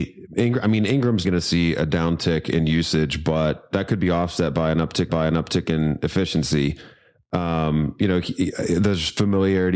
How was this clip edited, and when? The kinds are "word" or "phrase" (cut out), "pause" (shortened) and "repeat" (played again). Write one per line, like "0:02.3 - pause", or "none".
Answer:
0:01.2 - word
0:05.1 - repeat